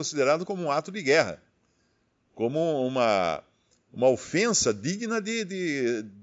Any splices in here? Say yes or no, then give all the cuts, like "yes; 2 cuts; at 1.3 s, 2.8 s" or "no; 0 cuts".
no; 0 cuts